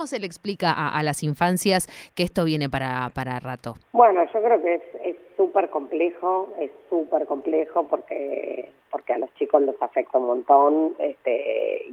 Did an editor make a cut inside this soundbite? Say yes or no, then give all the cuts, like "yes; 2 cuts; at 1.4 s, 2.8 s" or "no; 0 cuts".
yes; 1 cut; at 3.8 s